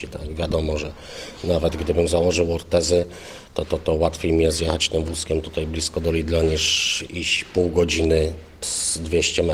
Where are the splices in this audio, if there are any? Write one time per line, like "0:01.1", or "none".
none